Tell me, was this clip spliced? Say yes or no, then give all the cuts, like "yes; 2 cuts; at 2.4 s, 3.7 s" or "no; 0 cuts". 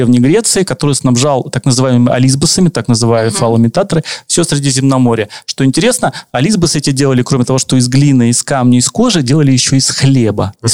no; 0 cuts